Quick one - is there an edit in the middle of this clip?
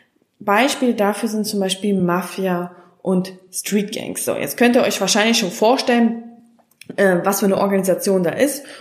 no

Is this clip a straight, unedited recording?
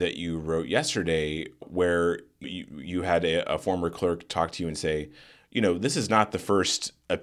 no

